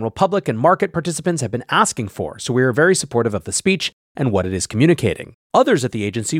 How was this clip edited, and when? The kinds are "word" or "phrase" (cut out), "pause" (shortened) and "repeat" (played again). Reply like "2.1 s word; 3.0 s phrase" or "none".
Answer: 5.4 s pause